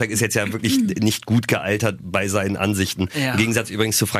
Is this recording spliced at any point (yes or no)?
no